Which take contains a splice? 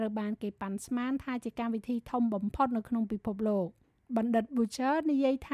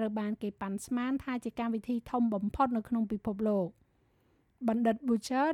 first; 1 cut; at 3.8 s

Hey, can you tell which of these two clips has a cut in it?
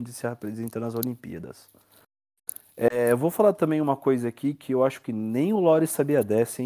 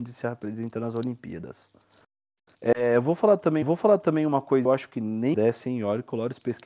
second; 4 cuts; at 2.5 s, 3.6 s, 4.7 s, 5.3 s

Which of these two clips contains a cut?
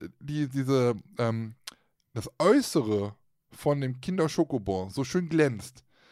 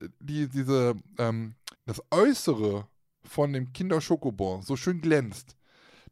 second; 1 cut; at 1.8 s

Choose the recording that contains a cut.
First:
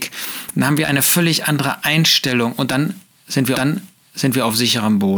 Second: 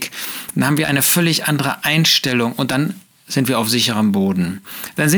first; 1 cut; at 3.5 s

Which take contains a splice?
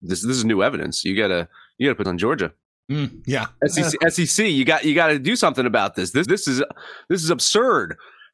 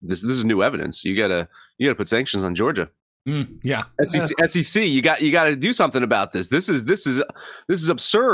first; 2 cuts; at 2.0 s, 6.2 s

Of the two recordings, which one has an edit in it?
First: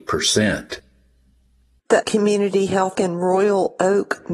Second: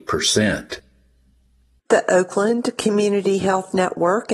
first; 2 cuts; at 2.0 s, 2.9 s

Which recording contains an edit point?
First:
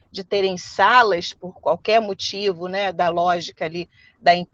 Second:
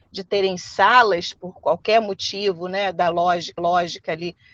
second; 1 cut; at 3.6 s

